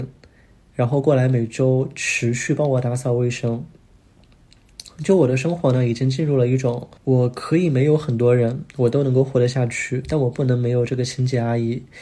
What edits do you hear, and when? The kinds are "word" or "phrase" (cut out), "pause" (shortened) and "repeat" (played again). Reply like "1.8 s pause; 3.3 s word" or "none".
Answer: 7.0 s pause; 8.7 s pause